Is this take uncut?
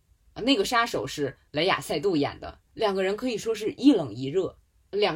no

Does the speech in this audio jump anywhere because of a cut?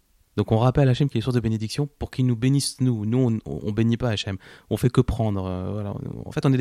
no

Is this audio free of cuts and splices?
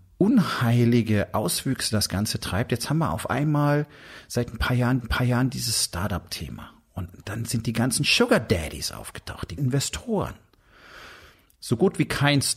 no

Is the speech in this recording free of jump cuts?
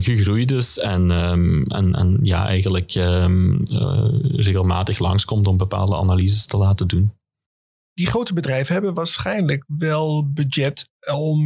yes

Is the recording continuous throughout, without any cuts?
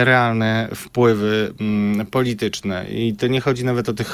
yes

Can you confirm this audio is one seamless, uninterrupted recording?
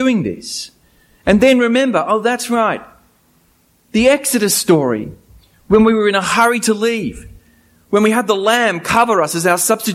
yes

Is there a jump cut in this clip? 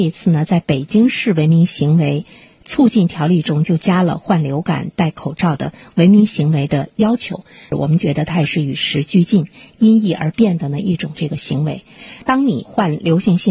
no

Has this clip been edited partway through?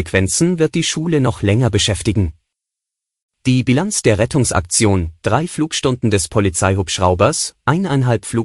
no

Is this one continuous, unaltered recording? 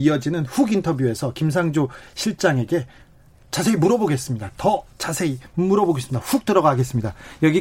yes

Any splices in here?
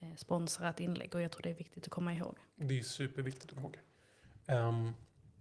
yes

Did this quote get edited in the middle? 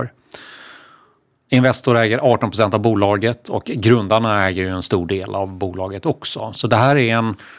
no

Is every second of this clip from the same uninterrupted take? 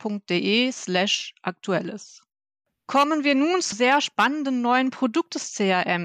no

